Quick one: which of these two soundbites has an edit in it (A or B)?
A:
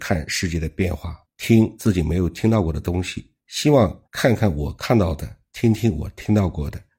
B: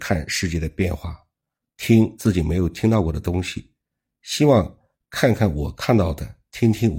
A